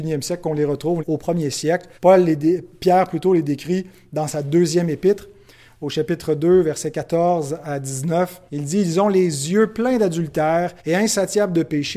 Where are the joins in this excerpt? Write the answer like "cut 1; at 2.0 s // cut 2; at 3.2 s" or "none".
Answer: cut 1; at 1.0 s // cut 2; at 2.0 s // cut 3; at 8.5 s // cut 4; at 10.8 s